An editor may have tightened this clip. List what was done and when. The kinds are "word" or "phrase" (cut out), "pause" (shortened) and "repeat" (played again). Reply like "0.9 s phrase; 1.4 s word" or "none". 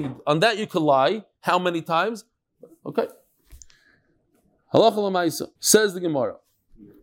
2.4 s pause; 5.6 s pause